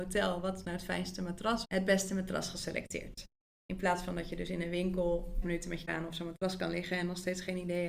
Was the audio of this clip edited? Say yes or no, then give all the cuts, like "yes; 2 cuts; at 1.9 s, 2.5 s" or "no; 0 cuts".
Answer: yes; 3 cuts; at 1.6 s, 5.4 s, 5.9 s